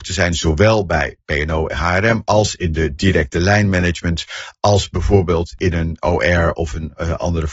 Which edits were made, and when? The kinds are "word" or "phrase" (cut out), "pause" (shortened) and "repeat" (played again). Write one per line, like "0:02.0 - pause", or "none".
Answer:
none